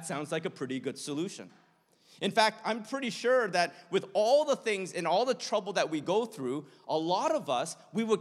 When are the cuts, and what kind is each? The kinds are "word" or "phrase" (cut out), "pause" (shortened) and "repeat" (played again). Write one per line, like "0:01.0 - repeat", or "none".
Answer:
none